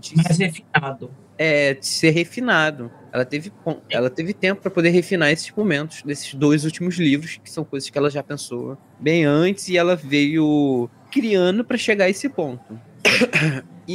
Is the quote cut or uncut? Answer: uncut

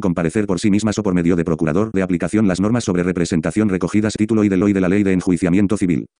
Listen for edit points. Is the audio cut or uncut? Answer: cut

